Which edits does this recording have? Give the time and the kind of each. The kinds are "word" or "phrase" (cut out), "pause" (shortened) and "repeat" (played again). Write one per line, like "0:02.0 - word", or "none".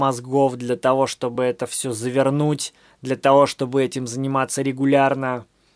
none